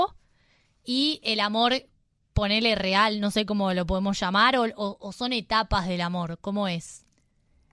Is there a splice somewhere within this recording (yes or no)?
no